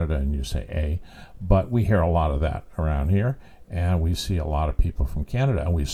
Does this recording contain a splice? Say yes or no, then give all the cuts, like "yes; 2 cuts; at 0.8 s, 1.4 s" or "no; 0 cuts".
no; 0 cuts